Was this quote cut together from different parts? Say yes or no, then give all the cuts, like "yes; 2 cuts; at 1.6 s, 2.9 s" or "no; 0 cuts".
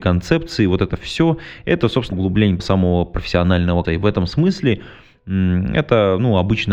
yes; 3 cuts; at 2.1 s, 2.6 s, 3.8 s